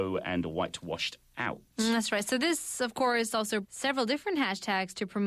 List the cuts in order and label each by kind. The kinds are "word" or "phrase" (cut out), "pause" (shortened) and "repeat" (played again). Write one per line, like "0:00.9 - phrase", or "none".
0:03.6 - phrase